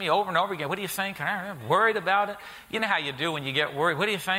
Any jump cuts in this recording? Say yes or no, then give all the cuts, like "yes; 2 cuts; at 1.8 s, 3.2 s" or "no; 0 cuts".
no; 0 cuts